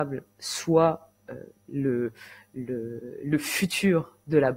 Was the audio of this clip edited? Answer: no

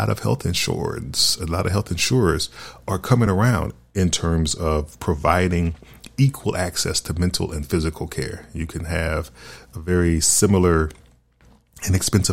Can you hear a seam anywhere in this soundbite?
no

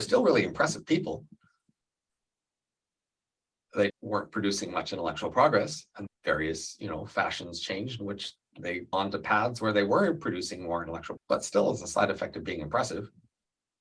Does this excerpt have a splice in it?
yes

